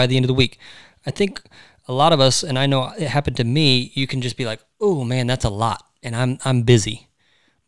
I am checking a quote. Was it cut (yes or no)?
no